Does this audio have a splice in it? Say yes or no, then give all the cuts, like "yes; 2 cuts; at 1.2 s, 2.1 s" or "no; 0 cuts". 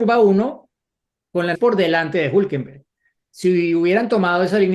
yes; 1 cut; at 1.5 s